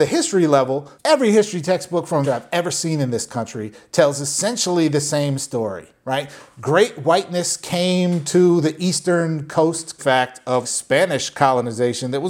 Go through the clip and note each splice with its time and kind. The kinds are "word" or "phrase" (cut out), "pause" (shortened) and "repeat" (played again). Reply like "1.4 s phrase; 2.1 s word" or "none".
1.0 s pause; 2.2 s phrase; 10.0 s phrase; 10.6 s word